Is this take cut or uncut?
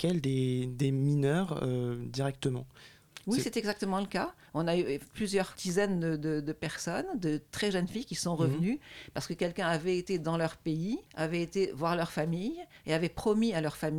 cut